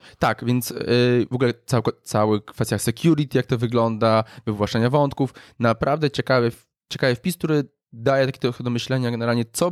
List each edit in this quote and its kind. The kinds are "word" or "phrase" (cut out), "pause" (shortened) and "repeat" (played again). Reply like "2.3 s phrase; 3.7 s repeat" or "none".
none